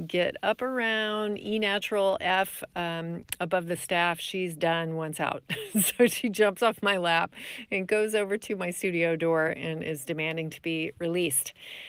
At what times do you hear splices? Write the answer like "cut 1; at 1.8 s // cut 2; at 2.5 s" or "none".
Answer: none